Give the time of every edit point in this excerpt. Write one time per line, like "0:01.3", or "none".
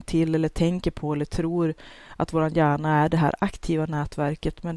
none